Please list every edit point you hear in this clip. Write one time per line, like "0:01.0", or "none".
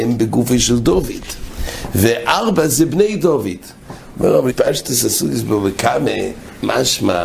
0:04.5

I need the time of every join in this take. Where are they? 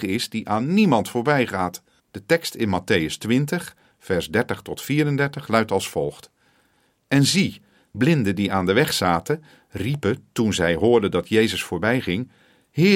0:02.0
0:07.9

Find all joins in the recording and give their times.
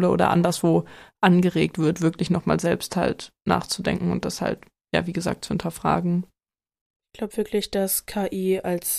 none

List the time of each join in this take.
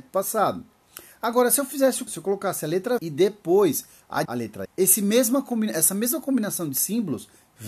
0:02.1
0:03.0
0:04.2
0:04.6

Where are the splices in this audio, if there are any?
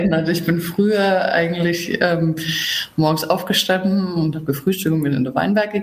none

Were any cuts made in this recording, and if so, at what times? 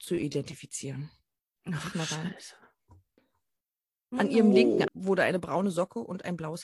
0:01.9
0:04.9

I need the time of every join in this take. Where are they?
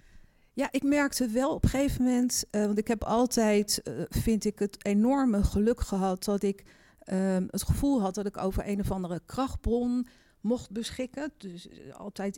none

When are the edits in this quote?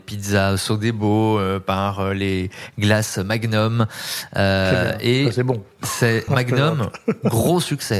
0:06.3

